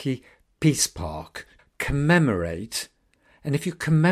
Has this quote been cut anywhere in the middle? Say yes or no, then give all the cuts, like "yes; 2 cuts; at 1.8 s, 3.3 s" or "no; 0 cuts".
yes; 1 cut; at 1.6 s